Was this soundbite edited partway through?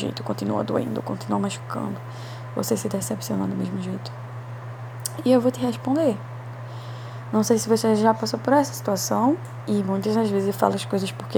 no; 0 cuts

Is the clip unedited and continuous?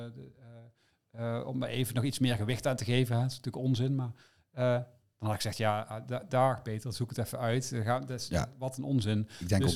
yes; 0 cuts

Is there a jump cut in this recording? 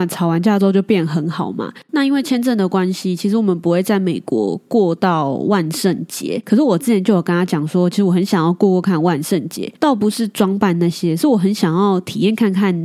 yes; 1 cut; at 9.8 s

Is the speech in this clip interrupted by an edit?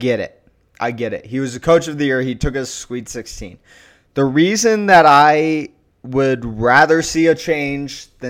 no; 0 cuts

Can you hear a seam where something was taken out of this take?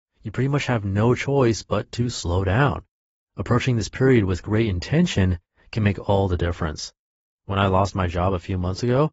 no; 0 cuts

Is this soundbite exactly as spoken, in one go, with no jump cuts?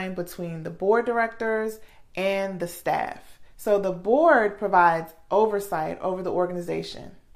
yes; 0 cuts

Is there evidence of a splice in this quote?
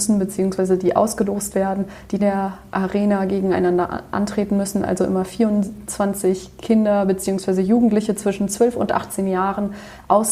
yes; 1 cut; at 2.2 s

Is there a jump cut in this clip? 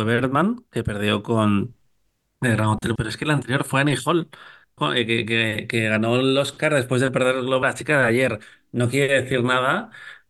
yes; 3 cuts; at 3.0 s, 4.8 s, 7.6 s

